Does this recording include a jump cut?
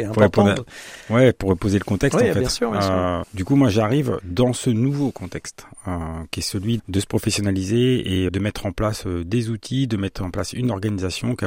yes; 3 cuts; at 3.2 s, 6.8 s, 8.3 s

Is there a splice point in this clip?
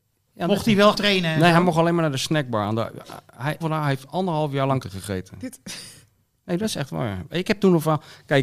yes; 3 cuts; at 0.9 s, 3.6 s, 4.8 s

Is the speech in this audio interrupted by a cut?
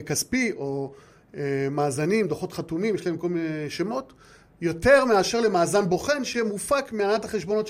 no; 0 cuts

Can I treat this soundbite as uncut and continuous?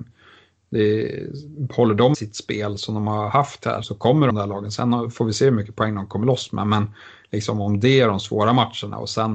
no; 3 cuts; at 2.1 s, 3.8 s, 4.3 s

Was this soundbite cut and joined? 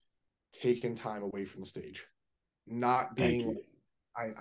yes; 1 cut; at 2.5 s

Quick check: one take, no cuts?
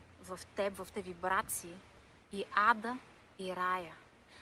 no; 2 cuts; at 0.9 s, 2.2 s

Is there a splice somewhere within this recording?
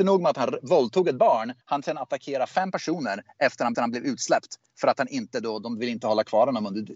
yes; 2 cuts; at 1.6 s, 3.7 s

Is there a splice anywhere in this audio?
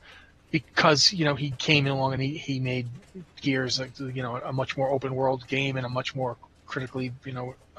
no; 0 cuts

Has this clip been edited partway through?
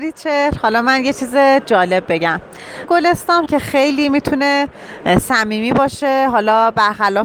yes; 2 cuts; at 2.8 s, 3.5 s

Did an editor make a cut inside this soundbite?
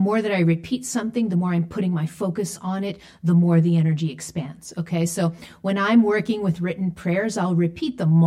no; 0 cuts

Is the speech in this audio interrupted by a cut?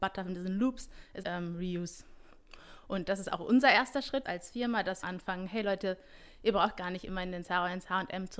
yes; 3 cuts; at 1.2 s, 4.2 s, 5.0 s

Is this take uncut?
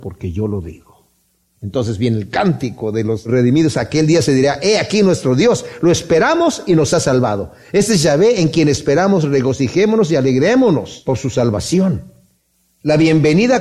yes; 0 cuts

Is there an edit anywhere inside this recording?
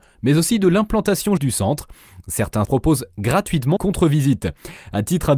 yes; 3 cuts; at 1.4 s, 2.6 s, 3.8 s

